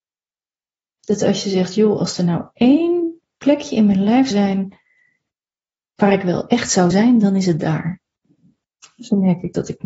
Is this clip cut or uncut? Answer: cut